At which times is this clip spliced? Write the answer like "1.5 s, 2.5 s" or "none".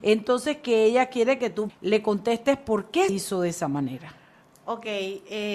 1.7 s, 3.1 s